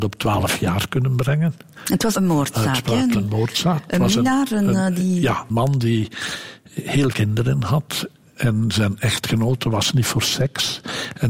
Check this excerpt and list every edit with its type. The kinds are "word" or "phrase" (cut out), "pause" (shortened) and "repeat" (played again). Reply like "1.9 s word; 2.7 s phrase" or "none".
2.1 s word; 3.1 s word; 5.5 s word; 7.1 s word